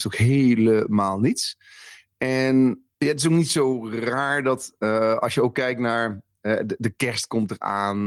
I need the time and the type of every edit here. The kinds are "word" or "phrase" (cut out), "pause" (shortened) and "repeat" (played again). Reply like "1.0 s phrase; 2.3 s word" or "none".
2.9 s pause